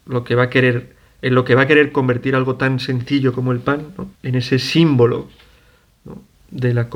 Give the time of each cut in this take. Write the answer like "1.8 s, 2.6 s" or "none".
4.1 s